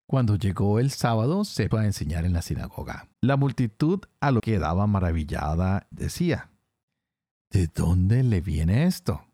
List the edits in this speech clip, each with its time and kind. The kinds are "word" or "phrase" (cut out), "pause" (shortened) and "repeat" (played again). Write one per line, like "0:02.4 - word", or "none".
0:01.7 - word
0:03.1 - pause
0:04.4 - word
0:05.9 - word